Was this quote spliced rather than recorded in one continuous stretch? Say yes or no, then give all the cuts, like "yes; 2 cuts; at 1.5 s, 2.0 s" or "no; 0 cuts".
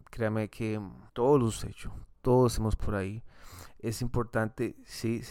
yes; 4 cuts; at 1.1 s, 1.6 s, 2.0 s, 2.8 s